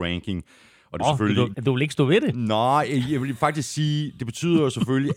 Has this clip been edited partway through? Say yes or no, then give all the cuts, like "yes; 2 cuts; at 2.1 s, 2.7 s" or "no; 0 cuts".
yes; 2 cuts; at 1.0 s, 1.5 s